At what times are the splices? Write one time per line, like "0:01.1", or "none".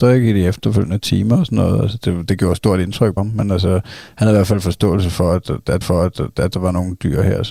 0:03.2
0:05.8